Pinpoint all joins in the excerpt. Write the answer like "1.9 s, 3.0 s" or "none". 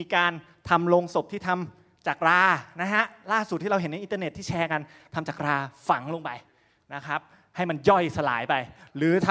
none